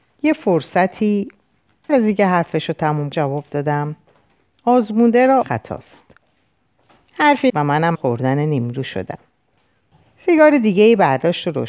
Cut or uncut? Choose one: cut